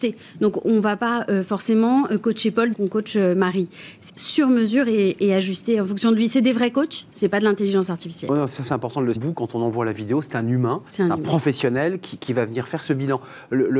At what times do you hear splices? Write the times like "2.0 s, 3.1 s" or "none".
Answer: 2.7 s, 4.1 s, 9.1 s, 10.9 s